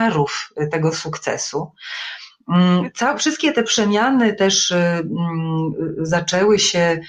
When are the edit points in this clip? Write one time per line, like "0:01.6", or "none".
none